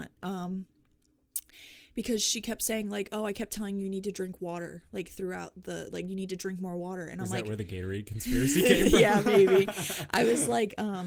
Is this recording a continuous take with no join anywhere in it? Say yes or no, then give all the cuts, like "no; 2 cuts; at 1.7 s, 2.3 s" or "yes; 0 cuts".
yes; 0 cuts